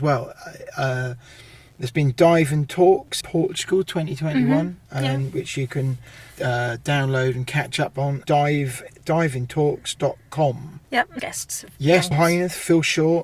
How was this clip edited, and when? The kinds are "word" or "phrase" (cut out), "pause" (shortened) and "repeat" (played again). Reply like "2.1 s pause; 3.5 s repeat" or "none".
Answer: 3.2 s word; 6.3 s pause; 8.2 s word; 10.8 s pause; 11.2 s phrase; 12.1 s word